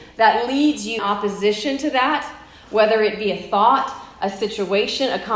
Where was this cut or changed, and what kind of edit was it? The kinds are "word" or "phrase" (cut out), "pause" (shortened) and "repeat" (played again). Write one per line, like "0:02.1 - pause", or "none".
0:01.0 - word